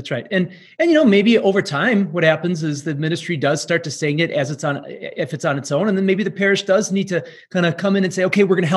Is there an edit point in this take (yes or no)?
no